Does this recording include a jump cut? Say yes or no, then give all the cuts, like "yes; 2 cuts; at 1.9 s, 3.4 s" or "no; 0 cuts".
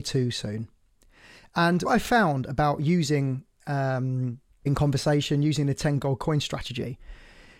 yes; 2 cuts; at 1.9 s, 4.7 s